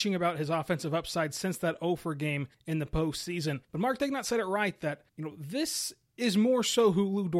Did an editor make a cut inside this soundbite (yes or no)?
yes